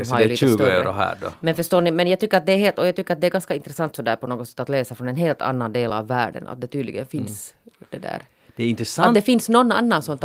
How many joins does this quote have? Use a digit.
0